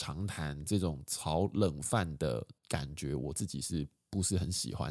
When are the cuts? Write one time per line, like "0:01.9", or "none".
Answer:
0:02.6